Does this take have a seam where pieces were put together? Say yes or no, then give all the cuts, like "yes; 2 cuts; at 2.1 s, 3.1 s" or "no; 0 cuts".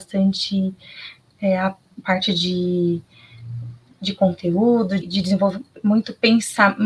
yes; 1 cut; at 5.0 s